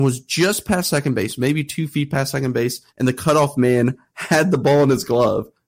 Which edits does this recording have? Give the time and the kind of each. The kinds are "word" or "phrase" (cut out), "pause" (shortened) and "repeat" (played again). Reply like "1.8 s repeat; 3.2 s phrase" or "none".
2.9 s pause